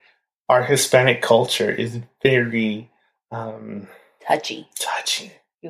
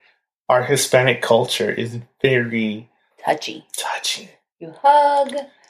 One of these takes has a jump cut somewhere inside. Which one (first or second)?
second